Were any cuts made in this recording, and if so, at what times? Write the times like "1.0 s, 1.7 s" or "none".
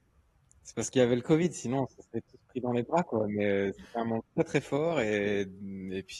3.7 s, 4.3 s